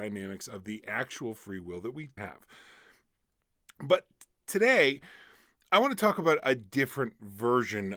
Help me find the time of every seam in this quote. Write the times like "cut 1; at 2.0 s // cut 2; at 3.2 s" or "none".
cut 1; at 2.2 s // cut 2; at 5.7 s